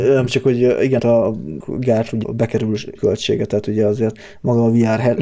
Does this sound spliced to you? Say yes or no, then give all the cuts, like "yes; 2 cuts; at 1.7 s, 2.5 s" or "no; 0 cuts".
yes; 4 cuts; at 1.0 s, 1.6 s, 2.2 s, 2.9 s